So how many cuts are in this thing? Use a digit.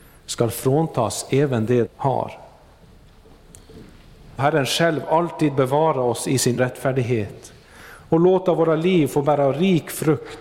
3